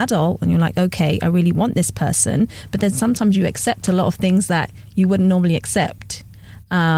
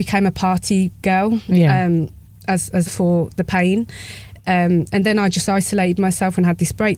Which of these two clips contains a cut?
second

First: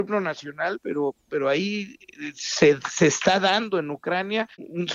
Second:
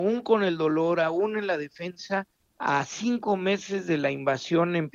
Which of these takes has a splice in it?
second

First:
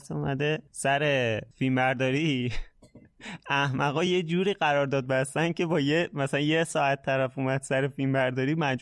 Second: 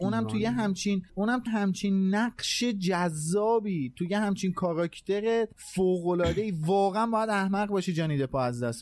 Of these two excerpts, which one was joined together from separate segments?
second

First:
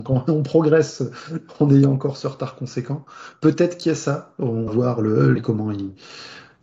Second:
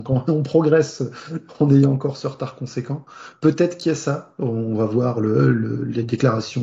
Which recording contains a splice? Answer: first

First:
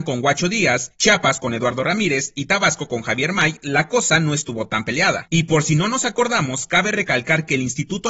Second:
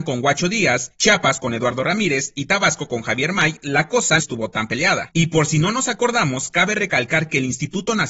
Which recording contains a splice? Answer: second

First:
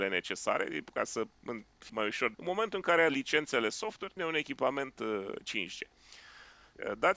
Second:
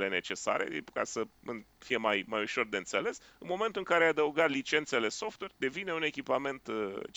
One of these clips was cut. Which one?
first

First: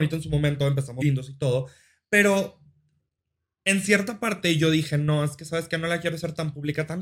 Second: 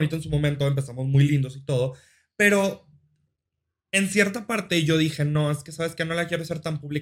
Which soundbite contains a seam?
first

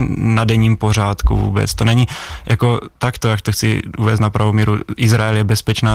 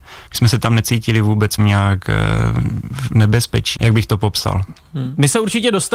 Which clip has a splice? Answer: second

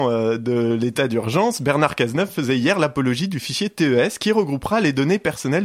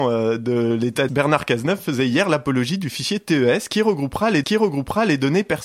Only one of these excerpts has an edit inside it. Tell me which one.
second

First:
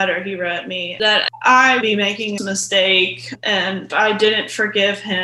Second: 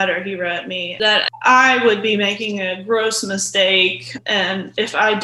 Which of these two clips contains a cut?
first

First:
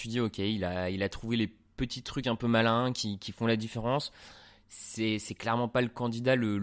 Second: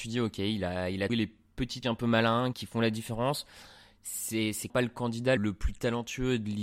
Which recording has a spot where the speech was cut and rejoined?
second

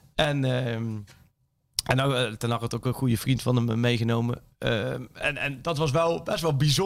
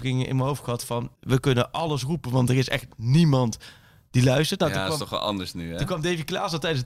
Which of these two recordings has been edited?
second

